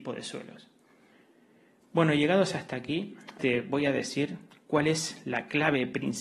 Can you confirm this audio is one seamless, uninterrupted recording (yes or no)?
no